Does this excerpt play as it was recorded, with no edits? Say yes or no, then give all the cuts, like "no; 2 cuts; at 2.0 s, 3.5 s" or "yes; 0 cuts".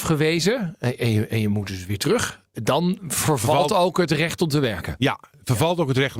yes; 0 cuts